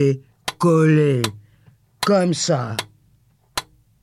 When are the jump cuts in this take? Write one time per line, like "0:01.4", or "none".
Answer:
none